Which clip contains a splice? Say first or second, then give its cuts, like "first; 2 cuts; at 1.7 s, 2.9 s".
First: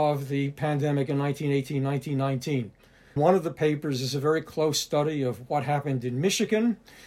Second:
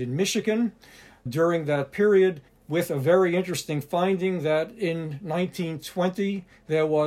second; 1 cut; at 2.5 s